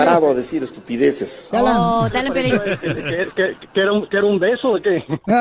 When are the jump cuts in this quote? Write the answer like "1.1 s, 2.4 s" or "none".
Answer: none